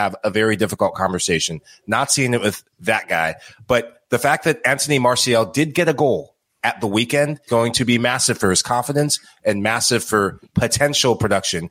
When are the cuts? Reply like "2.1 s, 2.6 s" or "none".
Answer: 7.5 s